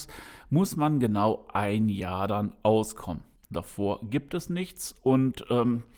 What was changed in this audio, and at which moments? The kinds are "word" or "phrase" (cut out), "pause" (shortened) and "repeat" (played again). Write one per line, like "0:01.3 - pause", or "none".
0:03.4 - pause